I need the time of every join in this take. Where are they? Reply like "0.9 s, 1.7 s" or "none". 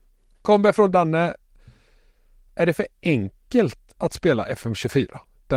0.9 s